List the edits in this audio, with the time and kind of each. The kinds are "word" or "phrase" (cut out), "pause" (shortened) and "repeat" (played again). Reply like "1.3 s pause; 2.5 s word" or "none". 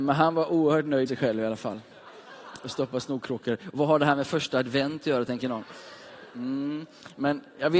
1.1 s word; 6.3 s pause